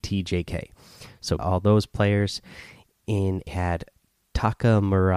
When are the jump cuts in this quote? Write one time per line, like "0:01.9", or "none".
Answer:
0:01.4
0:03.5